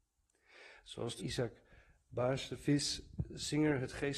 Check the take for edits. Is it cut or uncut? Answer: cut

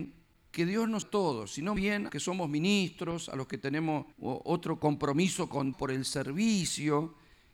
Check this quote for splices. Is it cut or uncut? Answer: cut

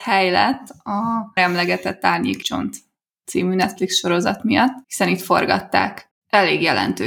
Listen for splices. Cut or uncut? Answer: cut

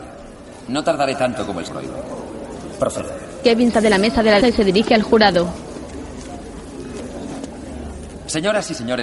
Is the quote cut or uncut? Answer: cut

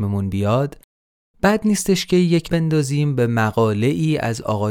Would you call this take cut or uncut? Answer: cut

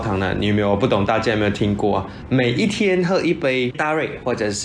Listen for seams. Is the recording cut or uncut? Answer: cut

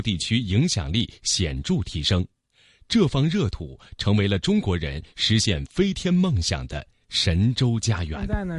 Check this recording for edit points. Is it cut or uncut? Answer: uncut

